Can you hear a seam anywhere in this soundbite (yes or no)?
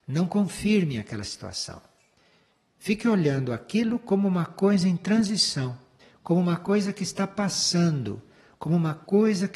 no